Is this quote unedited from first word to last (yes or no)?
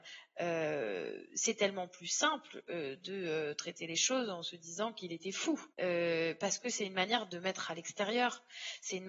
no